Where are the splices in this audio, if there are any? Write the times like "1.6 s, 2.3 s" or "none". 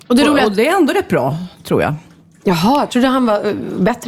none